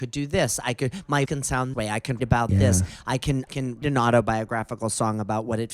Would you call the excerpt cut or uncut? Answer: cut